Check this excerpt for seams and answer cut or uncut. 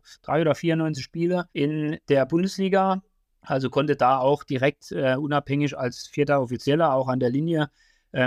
cut